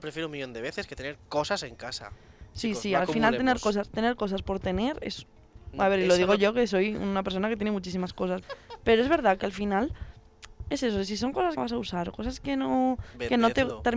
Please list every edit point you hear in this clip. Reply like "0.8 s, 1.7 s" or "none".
8.4 s, 11.6 s